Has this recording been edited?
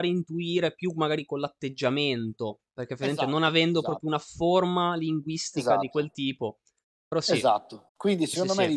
yes; 1 cut; at 7.9 s

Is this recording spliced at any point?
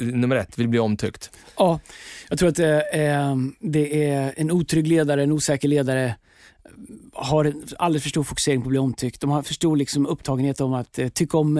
no; 0 cuts

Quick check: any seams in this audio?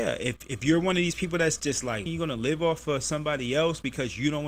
yes; 1 cut; at 2.1 s

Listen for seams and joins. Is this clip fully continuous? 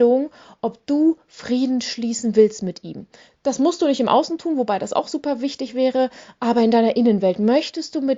yes; 0 cuts

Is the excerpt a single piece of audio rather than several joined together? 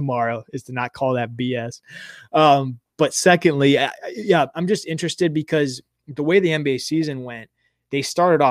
yes; 0 cuts

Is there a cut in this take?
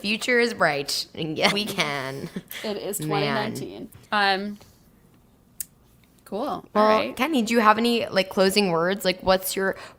yes; 2 cuts; at 1.5 s, 4.0 s

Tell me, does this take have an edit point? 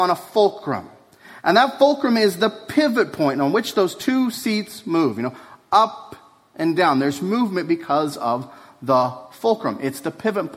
no; 0 cuts

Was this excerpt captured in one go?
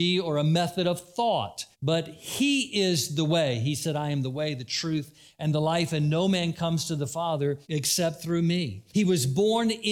no; 3 cuts; at 1.7 s, 7.6 s, 8.9 s

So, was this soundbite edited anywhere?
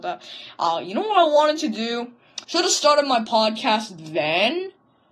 yes; 1 cut; at 2.4 s

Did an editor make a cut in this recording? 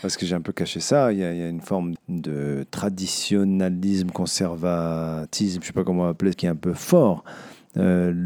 yes; 2 cuts; at 2.0 s, 6.3 s

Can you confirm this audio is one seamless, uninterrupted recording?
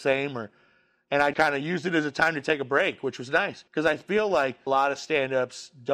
no; 3 cuts; at 1.3 s, 3.7 s, 4.7 s

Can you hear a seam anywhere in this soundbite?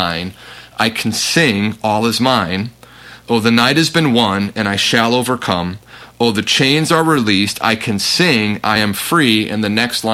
no; 0 cuts

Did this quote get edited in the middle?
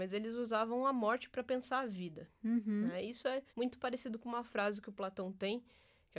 yes; 1 cut; at 3.5 s

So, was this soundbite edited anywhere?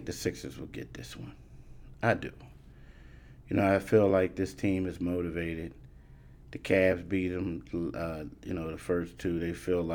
no; 0 cuts

